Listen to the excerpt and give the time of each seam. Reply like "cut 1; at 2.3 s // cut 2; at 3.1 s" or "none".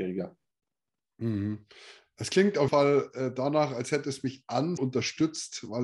cut 1; at 2.7 s // cut 2; at 4.8 s